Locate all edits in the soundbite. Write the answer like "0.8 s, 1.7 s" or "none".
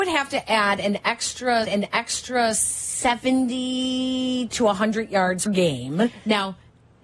1.6 s, 5.5 s